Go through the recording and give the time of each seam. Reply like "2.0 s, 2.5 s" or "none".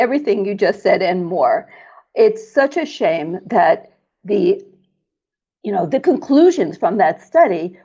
none